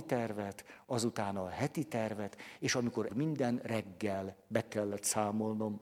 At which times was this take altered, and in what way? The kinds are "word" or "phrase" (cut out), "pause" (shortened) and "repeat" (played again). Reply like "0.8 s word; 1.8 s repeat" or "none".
3.1 s phrase